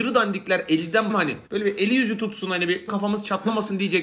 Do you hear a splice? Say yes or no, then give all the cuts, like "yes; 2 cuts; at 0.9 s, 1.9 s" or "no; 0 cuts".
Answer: yes; 3 cuts; at 1.1 s, 1.5 s, 2.9 s